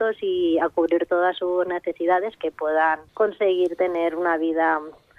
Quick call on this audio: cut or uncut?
cut